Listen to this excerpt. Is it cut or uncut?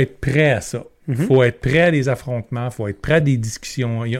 uncut